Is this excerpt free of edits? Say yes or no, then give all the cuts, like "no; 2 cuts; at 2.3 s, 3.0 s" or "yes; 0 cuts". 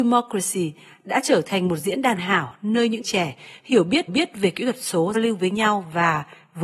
no; 4 cuts; at 2.2 s, 3.0 s, 4.1 s, 5.1 s